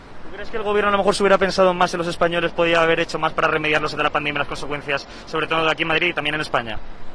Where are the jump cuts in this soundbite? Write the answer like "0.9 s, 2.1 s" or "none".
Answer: 4.0 s